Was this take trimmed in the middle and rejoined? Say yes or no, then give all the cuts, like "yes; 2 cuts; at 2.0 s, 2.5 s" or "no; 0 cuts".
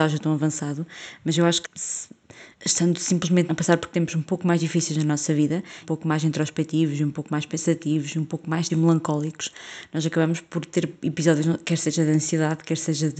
yes; 5 cuts; at 1.6 s, 2.5 s, 3.5 s, 5.8 s, 8.7 s